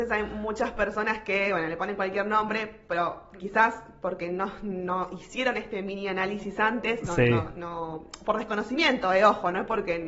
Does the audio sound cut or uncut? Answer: uncut